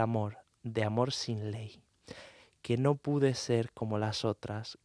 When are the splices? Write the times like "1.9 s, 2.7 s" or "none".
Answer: none